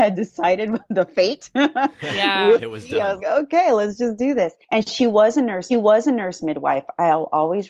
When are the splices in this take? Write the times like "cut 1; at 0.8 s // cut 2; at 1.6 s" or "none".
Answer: cut 1; at 3.2 s // cut 2; at 4.6 s // cut 3; at 5.7 s